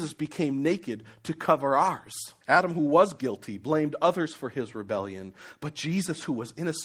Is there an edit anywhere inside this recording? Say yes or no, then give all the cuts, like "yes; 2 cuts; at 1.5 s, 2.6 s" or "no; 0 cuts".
yes; 1 cut; at 2.4 s